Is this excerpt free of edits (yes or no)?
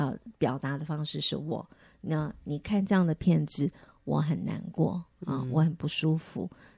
yes